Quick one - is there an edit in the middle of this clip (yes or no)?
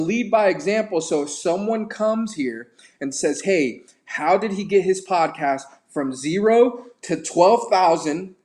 no